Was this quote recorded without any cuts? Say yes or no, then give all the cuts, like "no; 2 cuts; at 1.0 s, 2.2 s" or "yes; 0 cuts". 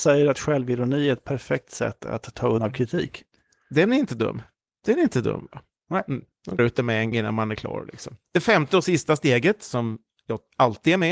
no; 4 cuts; at 2.0 s, 2.6 s, 6.6 s, 7.1 s